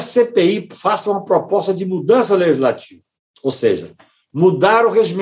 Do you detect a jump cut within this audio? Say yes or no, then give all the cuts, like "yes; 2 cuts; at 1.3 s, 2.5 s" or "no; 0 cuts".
no; 0 cuts